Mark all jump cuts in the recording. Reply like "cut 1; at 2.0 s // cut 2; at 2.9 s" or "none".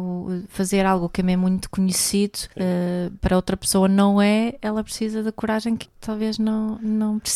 cut 1; at 2.5 s // cut 2; at 5.8 s